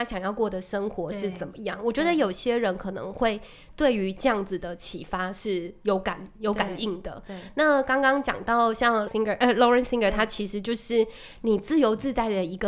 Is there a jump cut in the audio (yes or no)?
yes